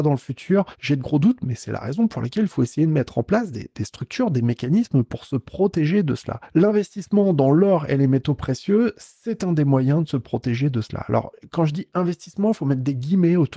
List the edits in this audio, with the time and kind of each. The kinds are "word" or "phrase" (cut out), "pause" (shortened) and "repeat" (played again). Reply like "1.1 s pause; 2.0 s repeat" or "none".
none